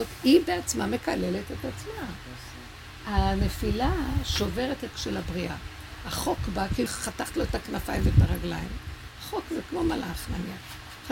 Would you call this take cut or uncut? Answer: cut